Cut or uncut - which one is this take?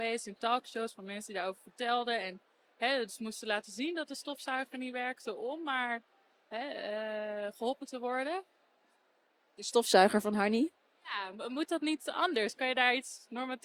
uncut